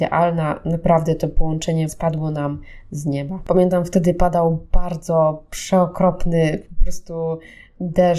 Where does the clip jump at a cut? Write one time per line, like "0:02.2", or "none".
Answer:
0:01.9

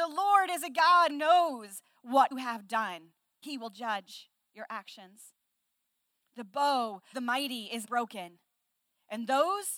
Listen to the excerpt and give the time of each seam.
0:01.1
0:02.3
0:03.4
0:07.1
0:07.8

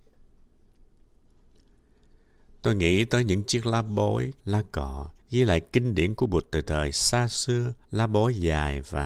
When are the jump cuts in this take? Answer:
0:04.4
0:05.2
0:07.8

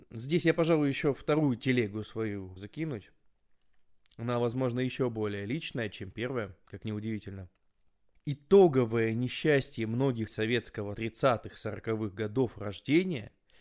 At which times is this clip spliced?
0:02.6
0:10.3
0:10.9

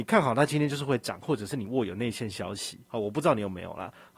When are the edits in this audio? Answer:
0:02.8

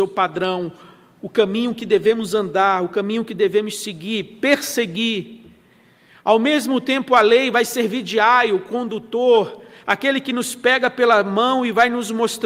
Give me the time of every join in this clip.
none

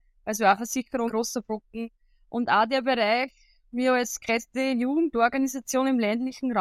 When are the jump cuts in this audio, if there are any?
0:01.1

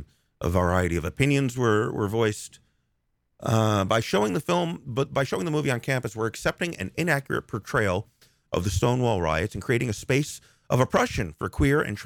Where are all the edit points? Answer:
none

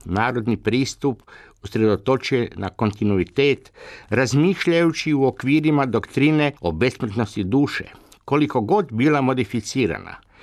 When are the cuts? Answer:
0:06.6

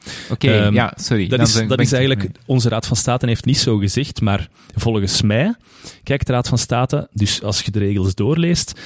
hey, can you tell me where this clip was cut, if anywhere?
0:03.4
0:07.1
0:07.7

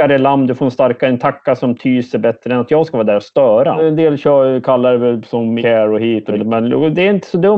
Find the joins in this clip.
0:05.6

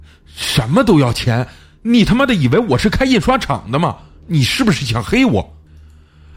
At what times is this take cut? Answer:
none

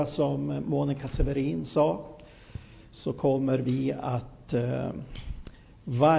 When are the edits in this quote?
none

